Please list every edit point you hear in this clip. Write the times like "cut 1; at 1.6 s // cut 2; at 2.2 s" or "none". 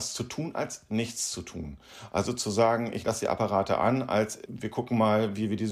none